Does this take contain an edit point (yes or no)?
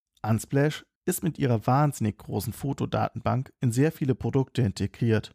yes